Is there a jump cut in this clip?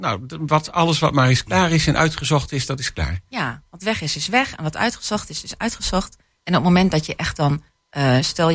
no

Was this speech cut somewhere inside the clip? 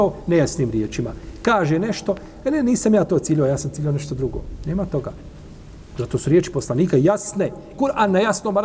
yes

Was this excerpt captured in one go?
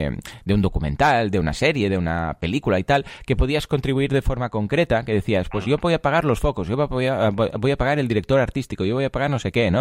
yes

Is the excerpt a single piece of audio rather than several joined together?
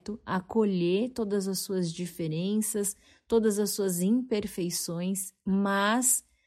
yes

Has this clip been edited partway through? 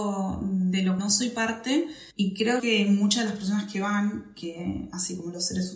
yes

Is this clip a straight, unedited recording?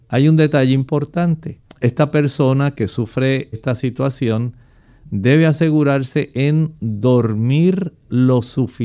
no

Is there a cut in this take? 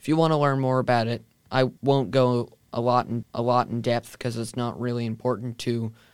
yes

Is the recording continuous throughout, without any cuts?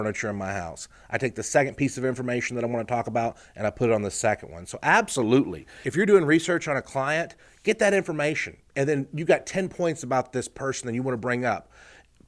yes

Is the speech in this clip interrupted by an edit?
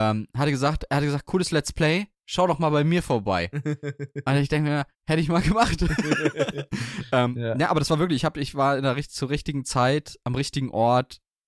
yes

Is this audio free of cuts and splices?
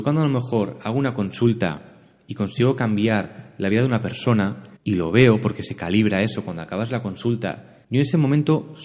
no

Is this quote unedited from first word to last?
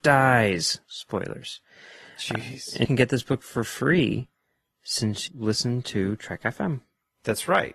no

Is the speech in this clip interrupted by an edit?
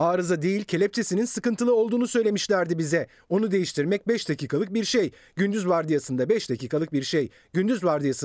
no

